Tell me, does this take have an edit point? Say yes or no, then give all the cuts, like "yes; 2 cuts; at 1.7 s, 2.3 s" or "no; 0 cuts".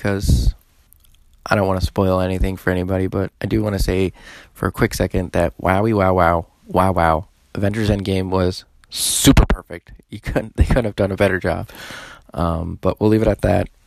yes; 1 cut; at 3.4 s